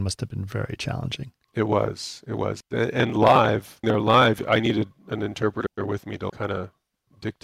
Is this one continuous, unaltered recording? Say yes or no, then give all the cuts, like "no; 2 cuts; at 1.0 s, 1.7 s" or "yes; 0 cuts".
no; 2 cuts; at 3.8 s, 6.3 s